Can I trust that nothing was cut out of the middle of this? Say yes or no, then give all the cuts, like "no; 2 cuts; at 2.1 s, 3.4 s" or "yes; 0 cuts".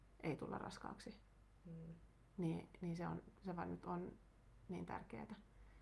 yes; 0 cuts